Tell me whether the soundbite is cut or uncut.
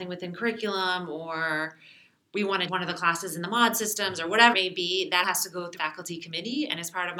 cut